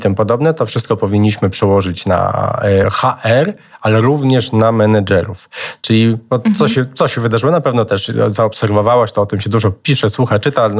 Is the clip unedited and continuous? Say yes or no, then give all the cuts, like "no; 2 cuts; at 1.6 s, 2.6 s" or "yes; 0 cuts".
yes; 0 cuts